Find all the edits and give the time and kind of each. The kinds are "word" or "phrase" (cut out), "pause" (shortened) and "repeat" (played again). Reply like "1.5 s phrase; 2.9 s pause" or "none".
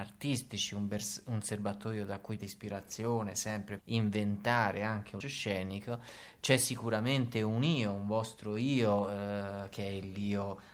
2.4 s word; 3.8 s word; 5.2 s word